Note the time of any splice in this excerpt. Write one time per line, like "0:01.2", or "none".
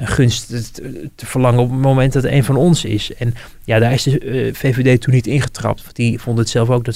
none